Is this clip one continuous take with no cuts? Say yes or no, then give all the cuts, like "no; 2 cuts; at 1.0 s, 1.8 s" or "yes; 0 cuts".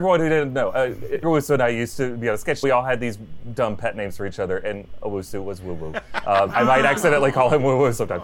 no; 3 cuts; at 1.2 s, 2.6 s, 6.5 s